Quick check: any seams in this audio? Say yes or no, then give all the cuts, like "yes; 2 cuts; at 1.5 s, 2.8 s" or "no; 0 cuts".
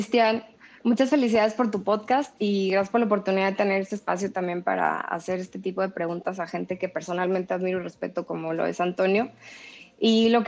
no; 0 cuts